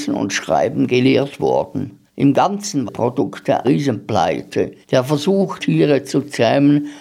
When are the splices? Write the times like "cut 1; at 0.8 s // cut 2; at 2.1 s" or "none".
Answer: cut 1; at 2.1 s // cut 2; at 2.9 s // cut 3; at 3.6 s // cut 4; at 4.8 s // cut 5; at 5.6 s